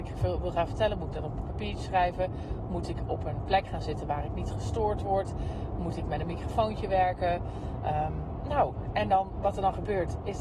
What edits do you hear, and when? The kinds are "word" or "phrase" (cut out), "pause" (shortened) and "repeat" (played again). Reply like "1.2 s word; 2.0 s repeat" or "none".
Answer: none